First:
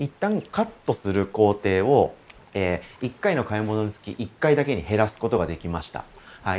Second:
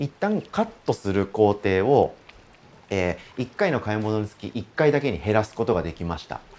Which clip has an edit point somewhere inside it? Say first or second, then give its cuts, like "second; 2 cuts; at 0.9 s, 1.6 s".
first; 1 cut; at 2.4 s